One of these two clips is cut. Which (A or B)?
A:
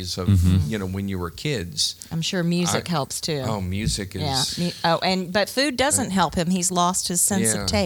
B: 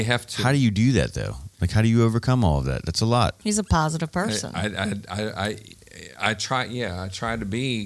B